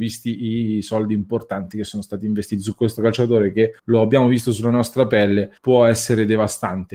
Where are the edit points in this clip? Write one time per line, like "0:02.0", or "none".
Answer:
0:03.8
0:05.6